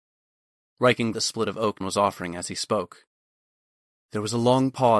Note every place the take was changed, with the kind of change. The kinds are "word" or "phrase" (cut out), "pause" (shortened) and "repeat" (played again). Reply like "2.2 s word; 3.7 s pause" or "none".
1.1 s word; 1.8 s word